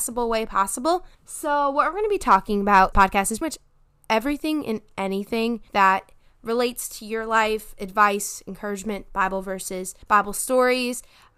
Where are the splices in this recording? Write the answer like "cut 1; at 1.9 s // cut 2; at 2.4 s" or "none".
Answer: cut 1; at 1.1 s // cut 2; at 2.9 s // cut 3; at 3.4 s // cut 4; at 5.7 s // cut 5; at 10.0 s